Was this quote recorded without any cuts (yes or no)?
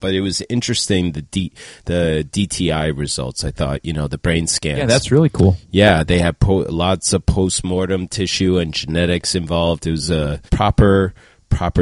no